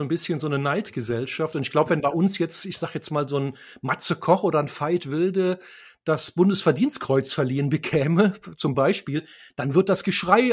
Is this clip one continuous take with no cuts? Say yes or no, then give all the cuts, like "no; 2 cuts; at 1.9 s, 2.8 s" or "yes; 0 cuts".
yes; 0 cuts